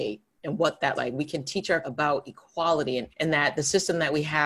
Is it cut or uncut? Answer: cut